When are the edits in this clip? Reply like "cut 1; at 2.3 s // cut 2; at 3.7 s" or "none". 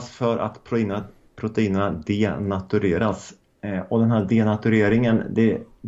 none